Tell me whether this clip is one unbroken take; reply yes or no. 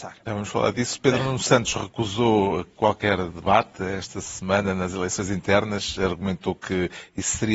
yes